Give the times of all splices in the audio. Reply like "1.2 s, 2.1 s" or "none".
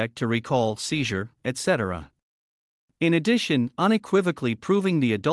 1.4 s